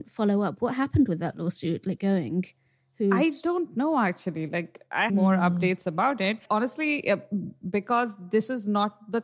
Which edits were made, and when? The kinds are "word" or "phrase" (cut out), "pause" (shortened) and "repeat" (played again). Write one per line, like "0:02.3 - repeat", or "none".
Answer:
0:02.0 - phrase
0:05.1 - phrase
0:06.4 - pause